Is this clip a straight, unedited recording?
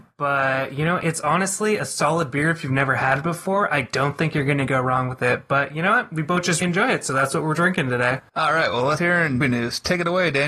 no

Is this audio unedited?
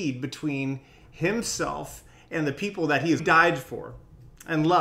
no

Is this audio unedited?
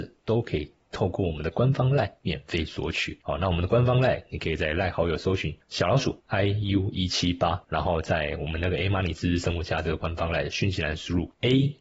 yes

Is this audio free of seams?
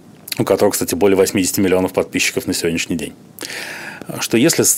yes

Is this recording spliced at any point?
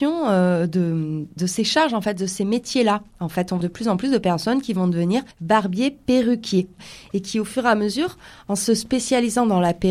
yes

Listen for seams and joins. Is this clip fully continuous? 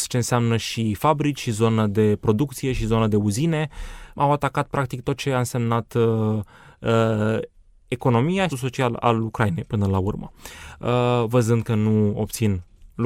no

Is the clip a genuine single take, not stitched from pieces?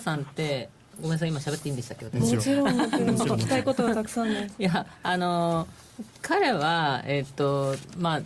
no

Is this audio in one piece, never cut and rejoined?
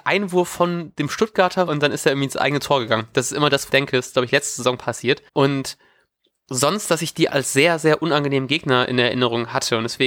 no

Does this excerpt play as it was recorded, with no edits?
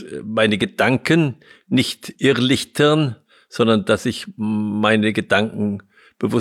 yes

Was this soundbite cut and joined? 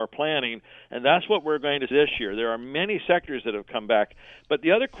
yes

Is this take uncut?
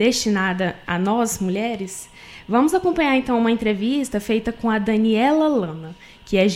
yes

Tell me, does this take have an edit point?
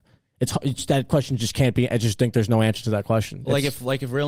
no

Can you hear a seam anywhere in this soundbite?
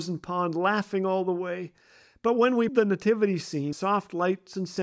yes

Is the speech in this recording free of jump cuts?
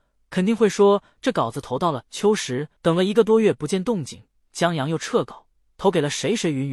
no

